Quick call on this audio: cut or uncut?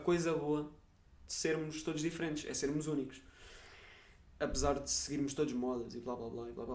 uncut